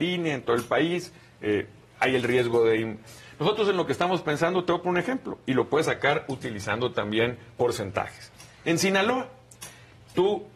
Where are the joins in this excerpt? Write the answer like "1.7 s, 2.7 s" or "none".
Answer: none